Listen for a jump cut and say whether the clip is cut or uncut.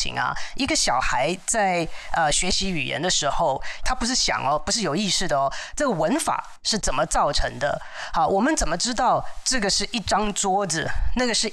uncut